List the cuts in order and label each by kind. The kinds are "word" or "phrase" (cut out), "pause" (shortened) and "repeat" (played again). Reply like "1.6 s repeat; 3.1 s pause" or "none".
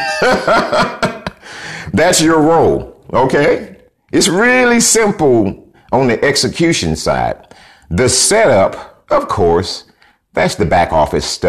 none